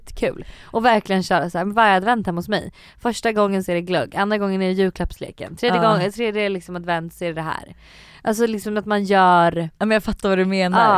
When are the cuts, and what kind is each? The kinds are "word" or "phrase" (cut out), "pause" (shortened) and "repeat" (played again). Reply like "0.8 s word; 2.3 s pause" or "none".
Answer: none